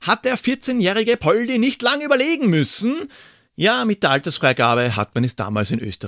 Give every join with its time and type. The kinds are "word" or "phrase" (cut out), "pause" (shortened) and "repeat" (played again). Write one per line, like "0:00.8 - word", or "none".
none